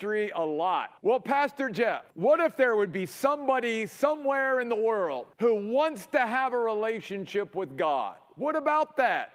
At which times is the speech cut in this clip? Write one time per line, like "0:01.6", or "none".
0:01.0
0:02.1
0:05.3